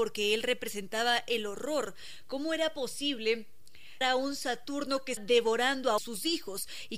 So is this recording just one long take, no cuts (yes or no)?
no